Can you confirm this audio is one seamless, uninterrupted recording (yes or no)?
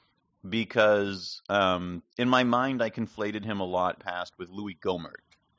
no